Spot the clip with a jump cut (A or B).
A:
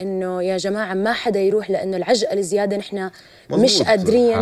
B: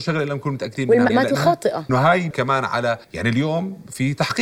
B